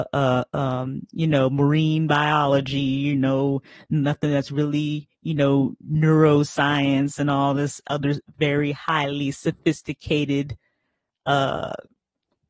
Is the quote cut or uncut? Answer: uncut